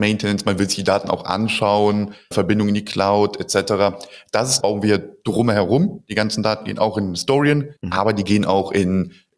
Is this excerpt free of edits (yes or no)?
no